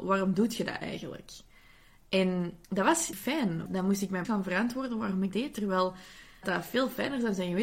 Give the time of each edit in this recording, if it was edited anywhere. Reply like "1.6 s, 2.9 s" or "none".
2.6 s, 3.1 s, 3.7 s, 4.2 s, 5.3 s, 6.4 s